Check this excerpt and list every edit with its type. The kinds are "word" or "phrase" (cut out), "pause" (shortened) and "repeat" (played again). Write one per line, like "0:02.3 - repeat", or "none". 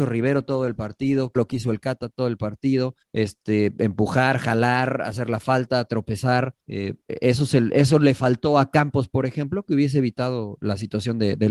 0:01.4 - word
0:03.0 - pause
0:06.6 - pause